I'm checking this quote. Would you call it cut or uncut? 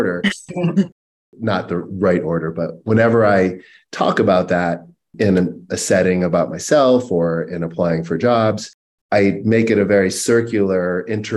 uncut